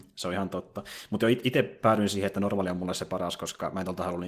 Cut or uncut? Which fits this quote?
uncut